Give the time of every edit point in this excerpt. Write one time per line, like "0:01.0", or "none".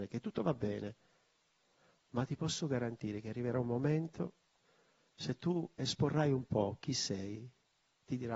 none